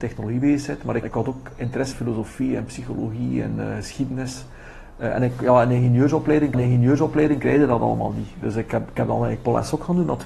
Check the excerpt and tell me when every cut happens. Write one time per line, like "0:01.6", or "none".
0:01.0
0:01.9
0:06.5